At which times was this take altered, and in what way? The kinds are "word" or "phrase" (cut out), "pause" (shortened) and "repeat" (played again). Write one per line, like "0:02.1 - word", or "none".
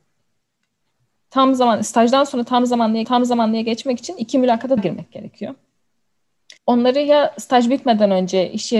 0:03.0 - repeat
0:04.8 - word
0:06.6 - pause